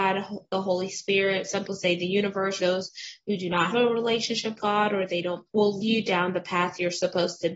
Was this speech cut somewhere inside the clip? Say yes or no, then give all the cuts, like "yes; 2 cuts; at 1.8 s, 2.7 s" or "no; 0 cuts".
yes; 6 cuts; at 1.7 s, 2.6 s, 3.7 s, 4.6 s, 5.5 s, 5.8 s